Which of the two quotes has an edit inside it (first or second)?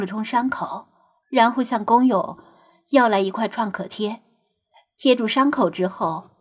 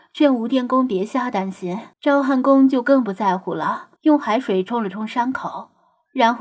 second